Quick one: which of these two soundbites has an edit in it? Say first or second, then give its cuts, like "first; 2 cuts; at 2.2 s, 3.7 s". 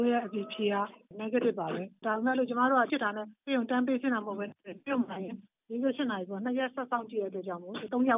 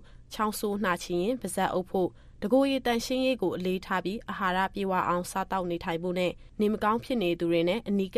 first; 1 cut; at 2.9 s